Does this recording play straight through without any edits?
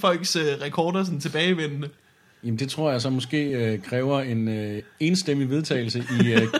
yes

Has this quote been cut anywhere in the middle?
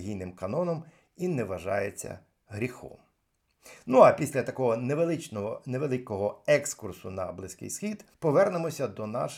yes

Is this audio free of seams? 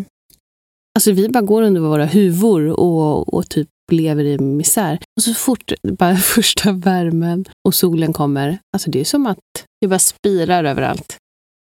no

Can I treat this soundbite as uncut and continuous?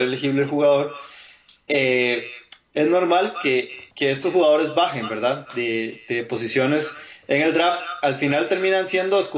no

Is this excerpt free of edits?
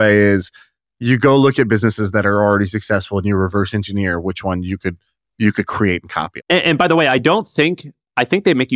yes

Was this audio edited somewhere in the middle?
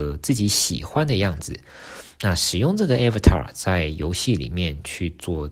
no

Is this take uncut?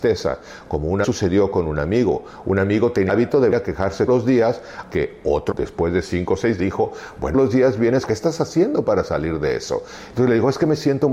no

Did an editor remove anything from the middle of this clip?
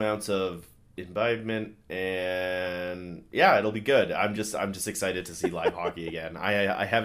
no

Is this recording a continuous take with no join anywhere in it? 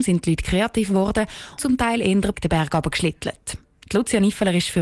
no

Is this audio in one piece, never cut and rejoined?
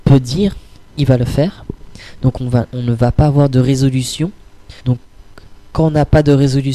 no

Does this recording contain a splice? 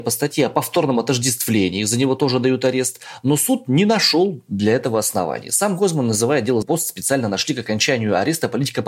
yes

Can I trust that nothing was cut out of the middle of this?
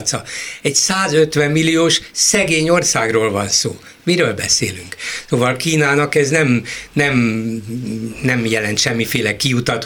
yes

